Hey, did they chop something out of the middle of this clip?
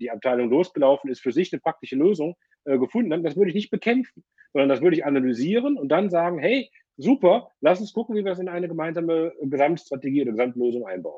no; 0 cuts

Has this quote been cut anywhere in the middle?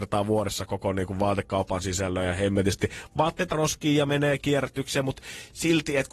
yes; 1 cut; at 3.5 s

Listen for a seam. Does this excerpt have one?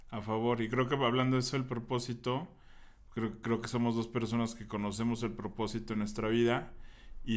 no; 0 cuts

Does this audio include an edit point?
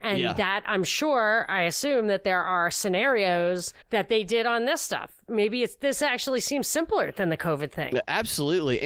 yes; 1 cut; at 3.8 s

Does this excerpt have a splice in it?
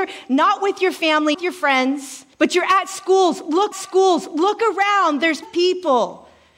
yes; 4 cuts; at 1.3 s, 2.3 s, 3.7 s, 5.4 s

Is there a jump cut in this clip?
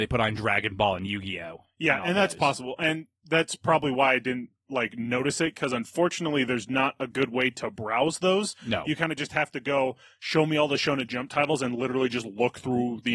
no; 0 cuts

